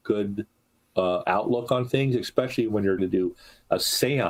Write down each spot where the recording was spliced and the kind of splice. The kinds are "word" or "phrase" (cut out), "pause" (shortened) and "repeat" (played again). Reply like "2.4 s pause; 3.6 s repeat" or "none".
3.0 s word